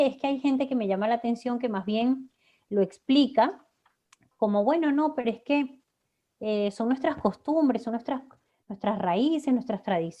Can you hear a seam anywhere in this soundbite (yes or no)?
no